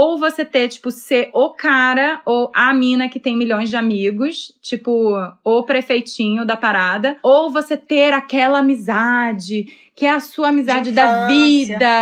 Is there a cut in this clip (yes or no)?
no